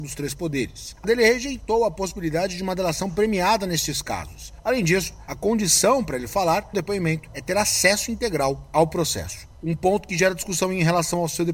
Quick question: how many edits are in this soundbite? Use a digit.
2